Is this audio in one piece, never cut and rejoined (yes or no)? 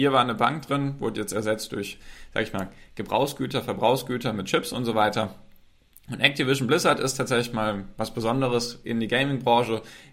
yes